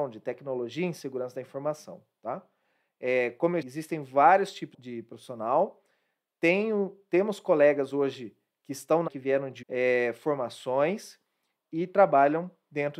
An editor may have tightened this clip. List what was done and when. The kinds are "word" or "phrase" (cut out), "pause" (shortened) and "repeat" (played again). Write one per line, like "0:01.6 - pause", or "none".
0:03.6 - word
0:04.7 - word
0:09.1 - word
0:09.6 - word